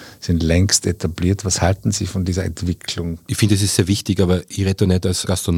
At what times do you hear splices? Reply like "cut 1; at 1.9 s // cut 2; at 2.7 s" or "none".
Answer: cut 1; at 3.2 s